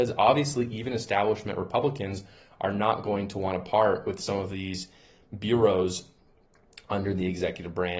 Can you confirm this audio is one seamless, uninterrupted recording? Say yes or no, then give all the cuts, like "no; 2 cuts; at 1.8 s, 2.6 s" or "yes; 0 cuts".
yes; 0 cuts